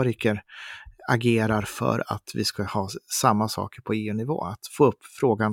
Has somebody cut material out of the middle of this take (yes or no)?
no